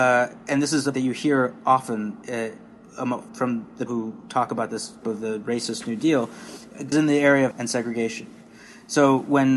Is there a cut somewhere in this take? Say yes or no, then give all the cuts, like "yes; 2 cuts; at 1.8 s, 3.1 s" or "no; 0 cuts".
yes; 6 cuts; at 0.9 s, 3.3 s, 3.9 s, 5.0 s, 6.9 s, 7.5 s